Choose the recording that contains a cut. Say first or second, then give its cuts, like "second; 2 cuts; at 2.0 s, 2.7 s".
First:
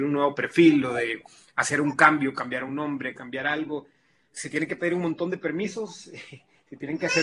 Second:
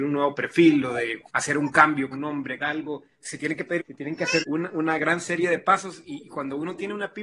second; 6 cuts; at 1.3 s, 2.1 s, 2.6 s, 3.1 s, 3.8 s, 4.4 s